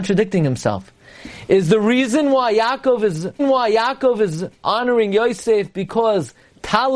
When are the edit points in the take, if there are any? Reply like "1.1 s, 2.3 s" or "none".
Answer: 3.4 s